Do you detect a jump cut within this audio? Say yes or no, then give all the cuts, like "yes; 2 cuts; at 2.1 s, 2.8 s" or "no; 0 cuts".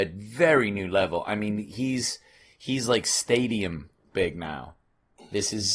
no; 0 cuts